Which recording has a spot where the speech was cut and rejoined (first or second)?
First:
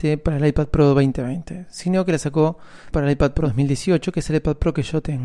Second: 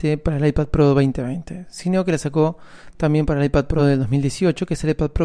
first